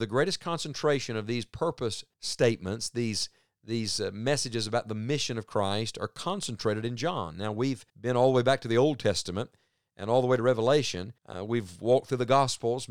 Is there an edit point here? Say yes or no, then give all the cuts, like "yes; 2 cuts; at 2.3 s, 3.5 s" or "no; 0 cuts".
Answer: yes; 3 cuts; at 2.1 s, 7.9 s, 11.2 s